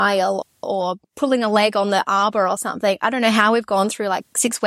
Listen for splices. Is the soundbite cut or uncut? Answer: uncut